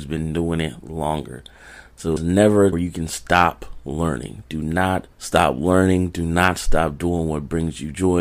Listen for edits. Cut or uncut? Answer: cut